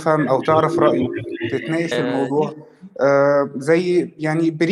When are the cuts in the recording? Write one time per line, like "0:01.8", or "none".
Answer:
0:01.9